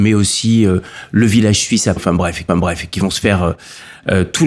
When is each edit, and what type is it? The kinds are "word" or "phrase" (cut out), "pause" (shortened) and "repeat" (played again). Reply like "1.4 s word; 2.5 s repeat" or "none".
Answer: 2.0 s word; 2.5 s repeat